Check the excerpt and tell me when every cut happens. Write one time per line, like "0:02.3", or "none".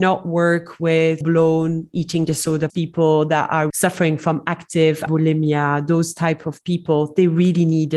0:01.2
0:02.7
0:03.7
0:05.1